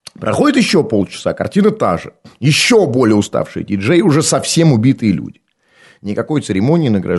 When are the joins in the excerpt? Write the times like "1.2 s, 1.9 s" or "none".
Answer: none